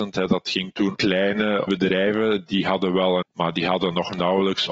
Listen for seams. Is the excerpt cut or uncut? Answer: cut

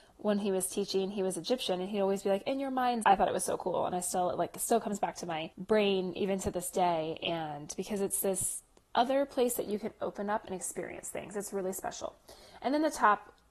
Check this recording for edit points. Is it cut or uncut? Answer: cut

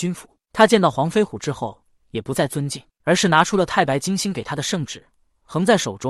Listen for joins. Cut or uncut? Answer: cut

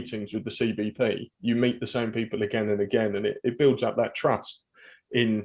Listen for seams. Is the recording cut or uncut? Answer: uncut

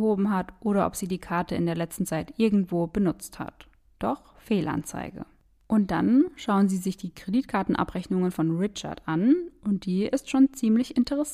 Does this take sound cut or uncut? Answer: uncut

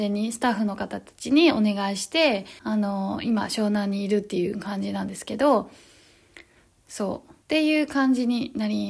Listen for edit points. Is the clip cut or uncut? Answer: cut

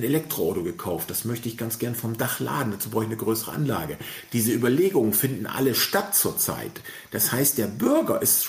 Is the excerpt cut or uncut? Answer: uncut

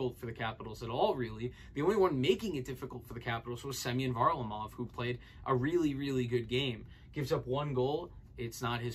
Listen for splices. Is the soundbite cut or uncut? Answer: uncut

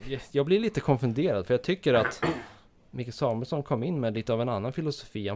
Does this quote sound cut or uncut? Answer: uncut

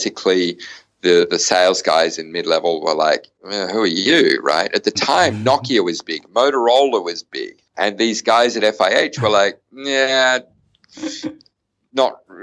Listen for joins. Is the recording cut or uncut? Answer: cut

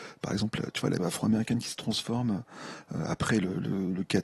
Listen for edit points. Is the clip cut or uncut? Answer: cut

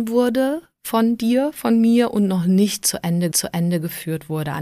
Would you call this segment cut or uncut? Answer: cut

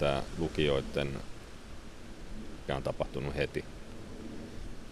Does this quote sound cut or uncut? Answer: cut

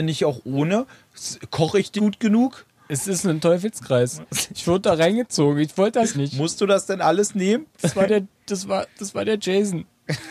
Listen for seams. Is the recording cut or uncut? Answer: cut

